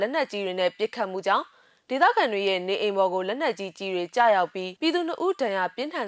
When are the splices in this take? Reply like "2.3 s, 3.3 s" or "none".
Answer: 4.8 s